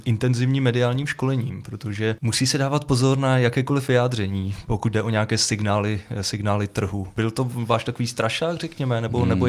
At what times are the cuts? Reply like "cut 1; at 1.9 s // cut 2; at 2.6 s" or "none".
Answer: cut 1; at 2.2 s

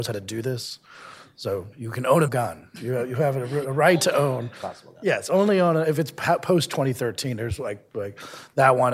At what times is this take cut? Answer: cut 1; at 2.3 s

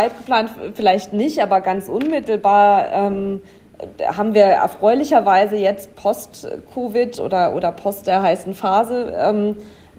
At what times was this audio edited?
none

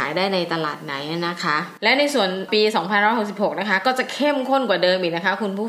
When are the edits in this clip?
none

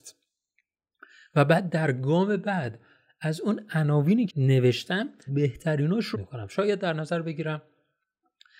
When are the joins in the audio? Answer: cut 1; at 4.3 s // cut 2; at 5.3 s // cut 3; at 6.1 s

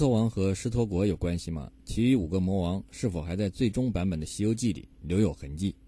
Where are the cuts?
cut 1; at 1.8 s // cut 2; at 4.9 s

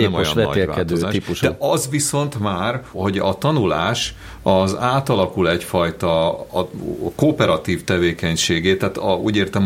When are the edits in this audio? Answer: cut 1; at 2.9 s

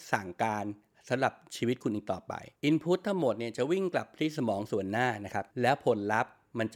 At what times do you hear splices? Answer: cut 1; at 2.6 s // cut 2; at 5.5 s

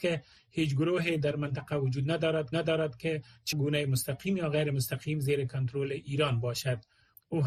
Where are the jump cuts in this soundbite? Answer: cut 1; at 2.5 s // cut 2; at 3.5 s

